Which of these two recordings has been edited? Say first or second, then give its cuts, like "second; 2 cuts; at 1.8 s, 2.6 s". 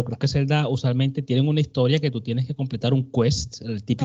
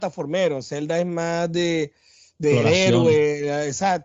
second; 1 cut; at 2.4 s